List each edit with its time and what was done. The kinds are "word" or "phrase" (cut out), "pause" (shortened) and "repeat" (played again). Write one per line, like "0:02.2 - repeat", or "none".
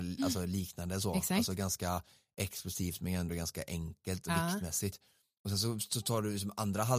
none